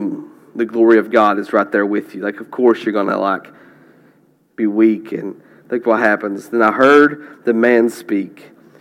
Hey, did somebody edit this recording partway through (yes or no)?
no